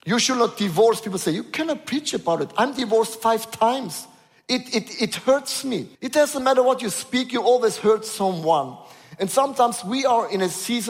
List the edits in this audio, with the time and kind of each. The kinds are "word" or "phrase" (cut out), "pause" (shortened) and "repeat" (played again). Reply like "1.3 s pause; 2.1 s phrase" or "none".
6.0 s pause